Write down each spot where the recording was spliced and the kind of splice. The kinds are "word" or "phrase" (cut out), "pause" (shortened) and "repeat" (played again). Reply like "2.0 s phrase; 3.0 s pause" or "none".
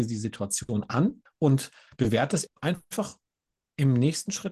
1.3 s pause; 2.5 s phrase